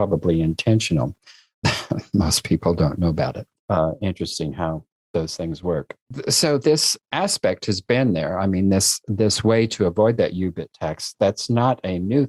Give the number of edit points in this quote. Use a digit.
0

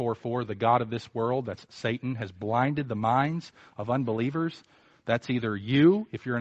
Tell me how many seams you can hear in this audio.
0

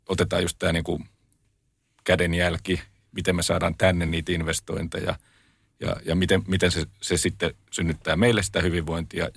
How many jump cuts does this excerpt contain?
0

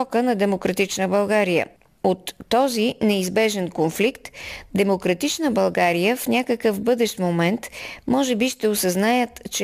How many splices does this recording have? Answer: 0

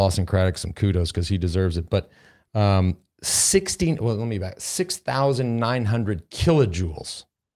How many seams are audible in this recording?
0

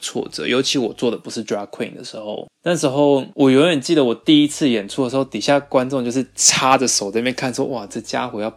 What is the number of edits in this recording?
0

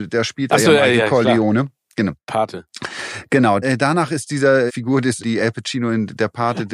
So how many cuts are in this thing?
3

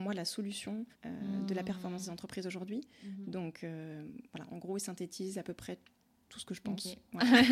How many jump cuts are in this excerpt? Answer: 1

